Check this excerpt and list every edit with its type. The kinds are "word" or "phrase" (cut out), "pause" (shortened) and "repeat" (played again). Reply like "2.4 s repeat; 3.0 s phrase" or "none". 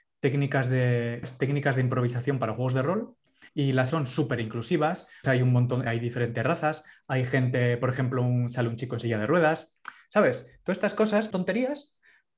1.2 s word; 3.5 s pause; 3.9 s word; 5.2 s word; 5.9 s word; 11.3 s word